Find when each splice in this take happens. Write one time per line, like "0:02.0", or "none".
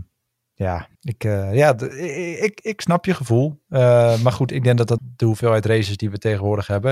0:00.9
0:05.0